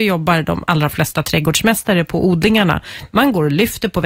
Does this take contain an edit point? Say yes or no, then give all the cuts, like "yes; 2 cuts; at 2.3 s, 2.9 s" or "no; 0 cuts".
no; 0 cuts